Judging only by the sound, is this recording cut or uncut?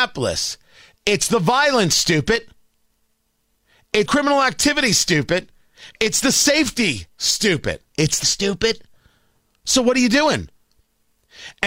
cut